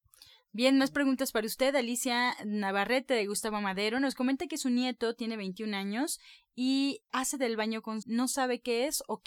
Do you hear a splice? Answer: yes; 2 cuts; at 7.1 s, 8.0 s

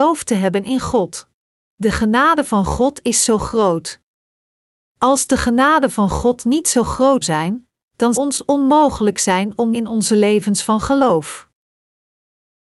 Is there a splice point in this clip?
yes; 4 cuts; at 1.5 s, 7.2 s, 8.1 s, 9.7 s

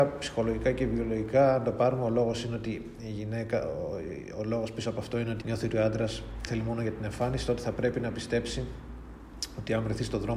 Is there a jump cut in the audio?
yes; 2 cuts; at 5.4 s, 6.5 s

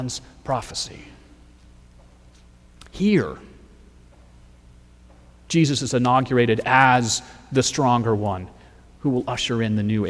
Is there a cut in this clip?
no; 0 cuts

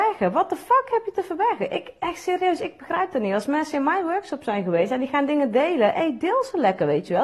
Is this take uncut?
yes; 0 cuts

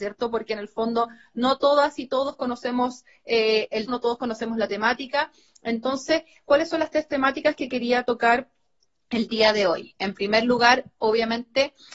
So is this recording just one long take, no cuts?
no; 1 cut; at 3.9 s

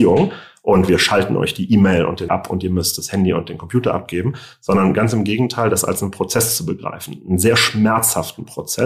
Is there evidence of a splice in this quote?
yes; 1 cut; at 2.3 s

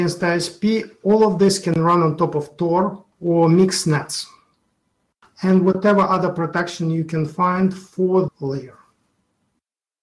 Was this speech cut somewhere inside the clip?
yes; 2 cuts; at 3.1 s, 8.3 s

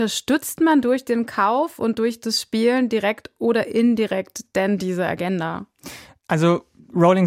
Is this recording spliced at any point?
no; 0 cuts

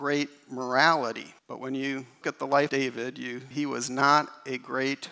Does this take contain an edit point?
yes; 4 cuts; at 1.4 s, 2.2 s, 2.7 s, 3.5 s

